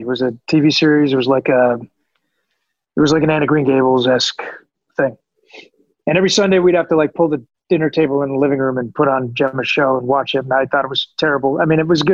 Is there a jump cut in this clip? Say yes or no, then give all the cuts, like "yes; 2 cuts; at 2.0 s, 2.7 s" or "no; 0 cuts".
no; 0 cuts